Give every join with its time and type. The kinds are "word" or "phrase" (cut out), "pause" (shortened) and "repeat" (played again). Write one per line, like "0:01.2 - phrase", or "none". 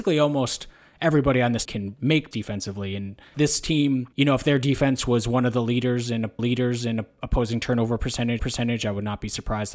0:01.6 - word
0:02.3 - word
0:03.3 - word
0:04.1 - pause
0:06.4 - repeat
0:08.4 - repeat